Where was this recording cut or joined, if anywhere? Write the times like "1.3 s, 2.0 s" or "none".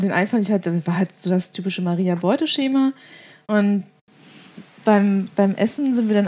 none